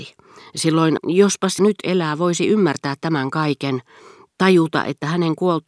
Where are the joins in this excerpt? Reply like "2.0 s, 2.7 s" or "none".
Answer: 1.0 s, 1.6 s